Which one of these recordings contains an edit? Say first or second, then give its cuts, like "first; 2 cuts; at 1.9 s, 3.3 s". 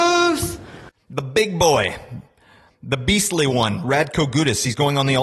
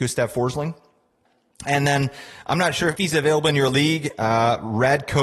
second; 1 cut; at 3.0 s